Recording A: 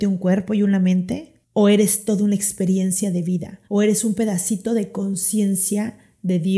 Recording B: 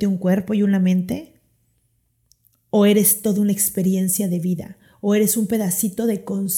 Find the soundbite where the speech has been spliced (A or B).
A